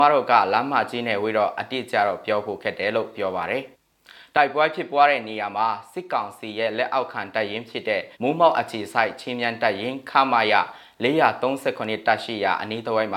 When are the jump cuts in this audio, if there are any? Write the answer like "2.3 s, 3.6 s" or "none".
3.7 s, 8.1 s